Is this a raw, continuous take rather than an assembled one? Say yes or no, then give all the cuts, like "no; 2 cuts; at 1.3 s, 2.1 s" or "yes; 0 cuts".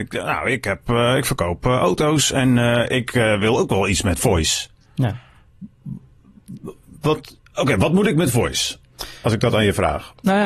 yes; 0 cuts